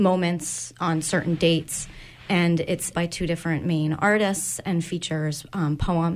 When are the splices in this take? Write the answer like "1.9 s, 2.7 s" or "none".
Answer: 2.9 s